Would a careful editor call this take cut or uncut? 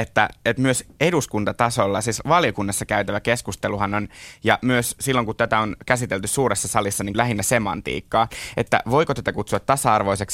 cut